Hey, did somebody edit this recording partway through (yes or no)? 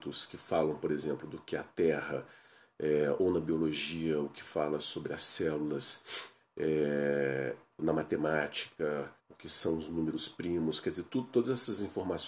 yes